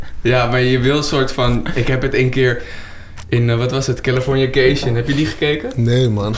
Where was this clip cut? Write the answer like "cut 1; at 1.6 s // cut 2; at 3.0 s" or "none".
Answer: none